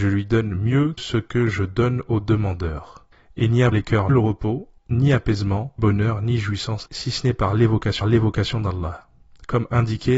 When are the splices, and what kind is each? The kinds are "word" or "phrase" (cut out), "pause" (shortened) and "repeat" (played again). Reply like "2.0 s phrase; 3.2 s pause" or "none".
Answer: 1.0 s word; 3.1 s pause; 3.7 s word; 4.1 s word; 4.8 s pause; 5.8 s word; 6.9 s phrase; 8.0 s repeat